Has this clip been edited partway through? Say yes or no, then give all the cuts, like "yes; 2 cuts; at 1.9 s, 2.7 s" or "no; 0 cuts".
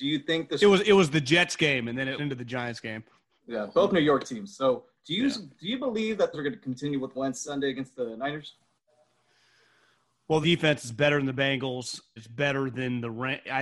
yes; 6 cuts; at 2.2 s, 6.3 s, 7.1 s, 7.4 s, 10.4 s, 12.2 s